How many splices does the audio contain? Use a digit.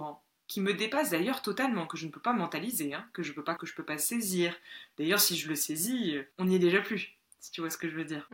2